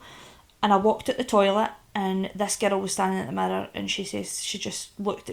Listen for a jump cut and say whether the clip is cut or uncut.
uncut